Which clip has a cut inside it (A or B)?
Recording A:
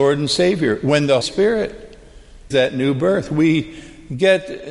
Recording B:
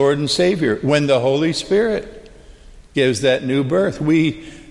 A